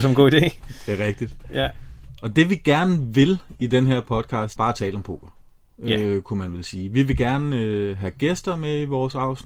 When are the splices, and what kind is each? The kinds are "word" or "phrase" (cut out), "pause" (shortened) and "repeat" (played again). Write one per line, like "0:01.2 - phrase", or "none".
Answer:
0:04.6 - phrase